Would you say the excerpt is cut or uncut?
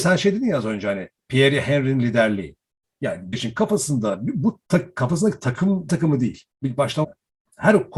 cut